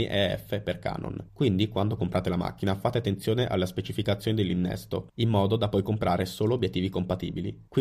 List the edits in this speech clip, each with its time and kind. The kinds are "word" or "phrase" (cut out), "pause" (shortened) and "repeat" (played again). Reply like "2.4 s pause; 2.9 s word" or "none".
none